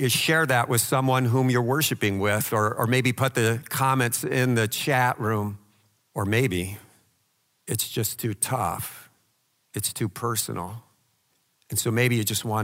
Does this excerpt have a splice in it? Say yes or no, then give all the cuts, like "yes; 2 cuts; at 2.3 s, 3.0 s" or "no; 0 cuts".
no; 0 cuts